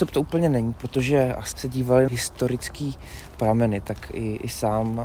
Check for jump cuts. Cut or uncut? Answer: cut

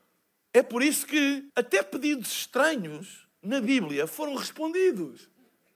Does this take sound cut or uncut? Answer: cut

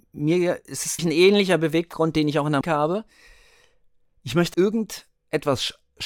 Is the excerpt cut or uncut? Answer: cut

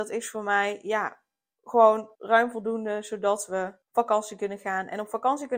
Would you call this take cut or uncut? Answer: cut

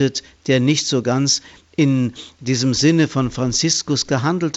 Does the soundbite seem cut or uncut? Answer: uncut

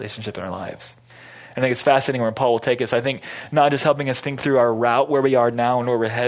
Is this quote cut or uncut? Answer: uncut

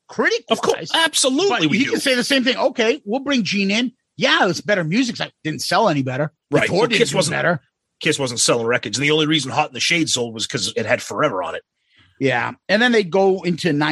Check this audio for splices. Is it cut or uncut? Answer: cut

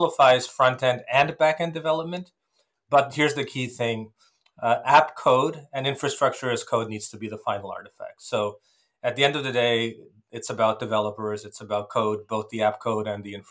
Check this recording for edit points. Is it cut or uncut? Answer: uncut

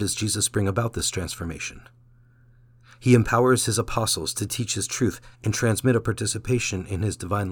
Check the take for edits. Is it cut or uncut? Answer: cut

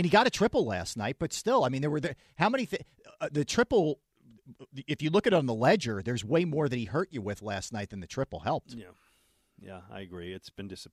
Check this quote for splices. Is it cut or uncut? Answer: uncut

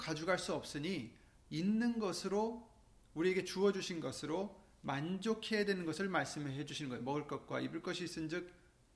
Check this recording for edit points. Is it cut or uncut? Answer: uncut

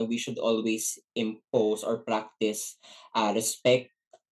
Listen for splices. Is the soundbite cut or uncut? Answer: uncut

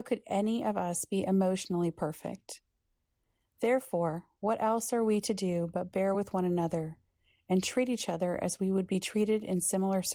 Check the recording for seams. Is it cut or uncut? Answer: uncut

